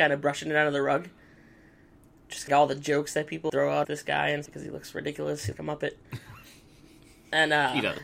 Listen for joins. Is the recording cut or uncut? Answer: cut